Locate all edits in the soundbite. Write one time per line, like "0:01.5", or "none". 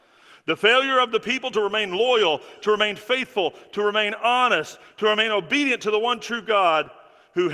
none